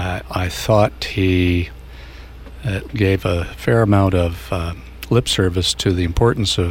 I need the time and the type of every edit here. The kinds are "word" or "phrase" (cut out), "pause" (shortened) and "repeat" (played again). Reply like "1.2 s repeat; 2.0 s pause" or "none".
2.9 s word